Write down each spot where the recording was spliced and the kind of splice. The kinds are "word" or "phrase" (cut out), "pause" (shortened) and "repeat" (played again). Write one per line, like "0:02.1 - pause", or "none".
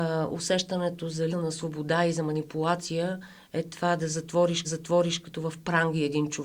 0:01.3 - word
0:04.6 - repeat